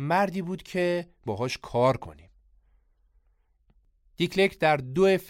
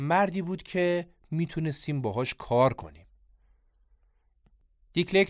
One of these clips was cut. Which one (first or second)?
first